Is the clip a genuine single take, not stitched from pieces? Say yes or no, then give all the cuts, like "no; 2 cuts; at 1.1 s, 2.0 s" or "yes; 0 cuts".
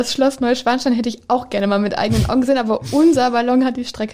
yes; 0 cuts